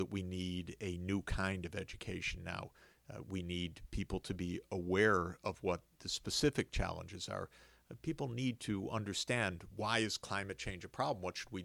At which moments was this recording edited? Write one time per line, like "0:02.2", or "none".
none